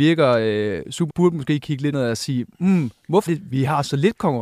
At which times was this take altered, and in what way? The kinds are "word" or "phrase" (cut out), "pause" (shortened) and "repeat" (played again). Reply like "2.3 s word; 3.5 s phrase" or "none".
1.1 s word; 1.9 s word; 3.3 s word